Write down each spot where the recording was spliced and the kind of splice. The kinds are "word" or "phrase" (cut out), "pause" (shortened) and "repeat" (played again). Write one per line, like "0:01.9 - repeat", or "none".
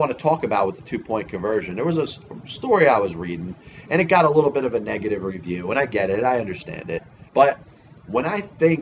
0:07.3 - pause